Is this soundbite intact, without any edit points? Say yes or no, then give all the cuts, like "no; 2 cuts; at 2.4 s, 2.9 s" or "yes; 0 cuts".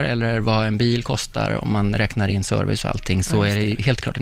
yes; 0 cuts